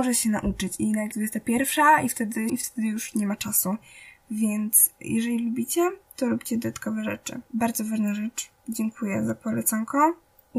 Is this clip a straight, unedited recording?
no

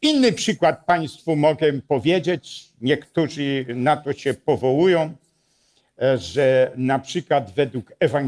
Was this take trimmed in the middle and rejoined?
no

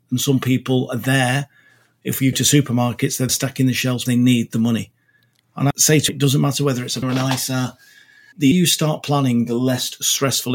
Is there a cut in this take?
yes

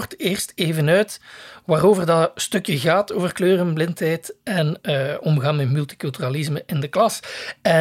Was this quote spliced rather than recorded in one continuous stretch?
no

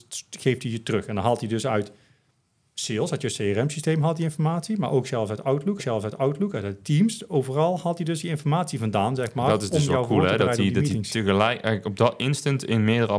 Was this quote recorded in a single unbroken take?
no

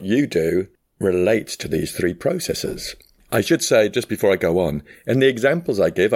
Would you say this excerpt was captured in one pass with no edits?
yes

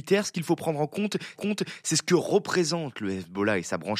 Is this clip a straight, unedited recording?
no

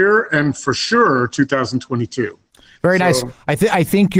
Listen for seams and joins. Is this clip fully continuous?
yes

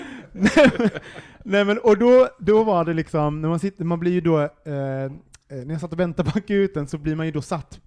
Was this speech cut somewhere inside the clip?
no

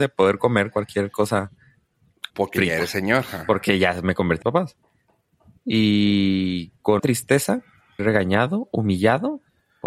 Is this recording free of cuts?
no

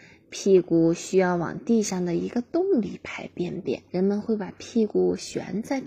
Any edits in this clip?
yes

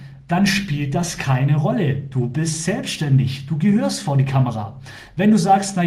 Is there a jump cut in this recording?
no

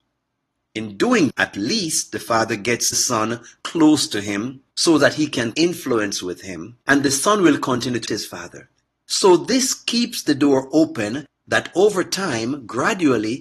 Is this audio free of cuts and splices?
no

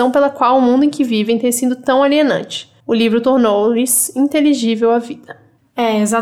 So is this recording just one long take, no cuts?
yes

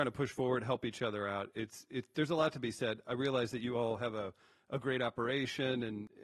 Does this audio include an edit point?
no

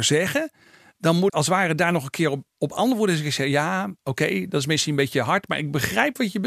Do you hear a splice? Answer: yes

